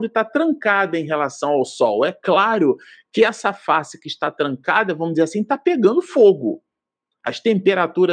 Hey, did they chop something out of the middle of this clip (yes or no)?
no